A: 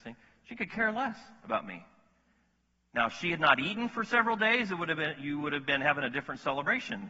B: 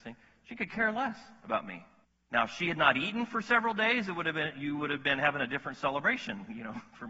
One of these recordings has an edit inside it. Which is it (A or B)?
B